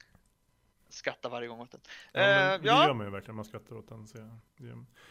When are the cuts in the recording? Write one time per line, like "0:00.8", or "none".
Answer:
none